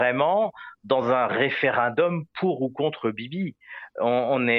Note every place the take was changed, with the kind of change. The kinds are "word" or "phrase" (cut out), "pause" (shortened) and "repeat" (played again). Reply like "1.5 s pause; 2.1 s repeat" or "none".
none